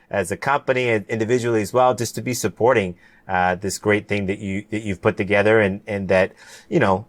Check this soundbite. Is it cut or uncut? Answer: uncut